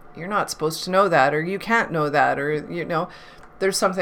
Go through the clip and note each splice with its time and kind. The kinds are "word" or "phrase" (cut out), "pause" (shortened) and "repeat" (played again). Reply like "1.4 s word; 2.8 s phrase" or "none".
none